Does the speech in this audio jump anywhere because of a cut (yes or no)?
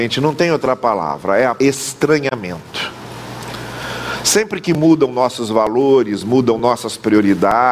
yes